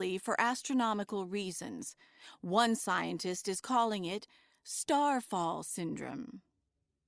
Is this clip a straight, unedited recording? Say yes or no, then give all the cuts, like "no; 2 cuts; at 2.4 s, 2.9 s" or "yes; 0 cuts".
yes; 0 cuts